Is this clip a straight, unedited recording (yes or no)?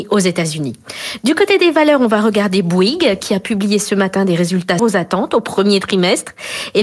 no